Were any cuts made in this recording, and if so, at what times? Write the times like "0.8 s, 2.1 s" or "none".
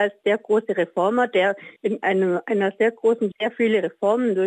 1.8 s, 3.3 s